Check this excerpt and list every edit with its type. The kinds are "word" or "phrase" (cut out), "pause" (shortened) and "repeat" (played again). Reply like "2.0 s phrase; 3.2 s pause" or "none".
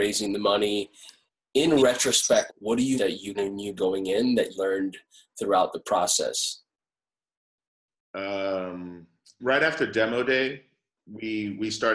2.5 s word; 3.0 s word; 3.3 s word; 3.8 s word; 4.5 s word; 9.4 s word